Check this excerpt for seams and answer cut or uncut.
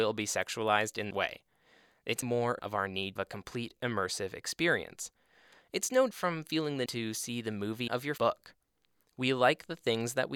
cut